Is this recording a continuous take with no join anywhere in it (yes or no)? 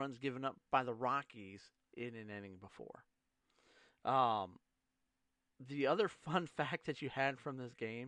yes